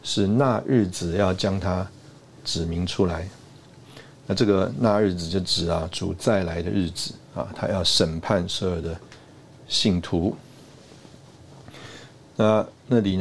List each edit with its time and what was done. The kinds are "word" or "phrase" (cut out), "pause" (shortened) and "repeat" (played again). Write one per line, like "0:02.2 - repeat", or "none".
none